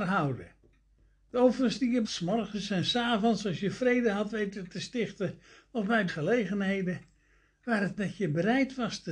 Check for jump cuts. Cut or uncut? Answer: cut